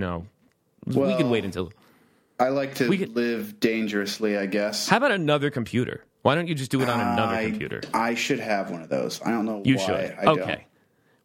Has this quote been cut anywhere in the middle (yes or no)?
no